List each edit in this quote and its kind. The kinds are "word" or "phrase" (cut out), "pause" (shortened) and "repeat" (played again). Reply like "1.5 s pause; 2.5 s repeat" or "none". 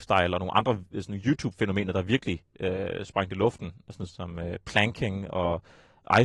4.1 s word